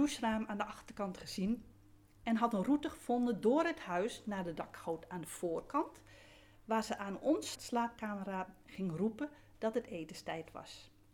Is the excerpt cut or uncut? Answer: cut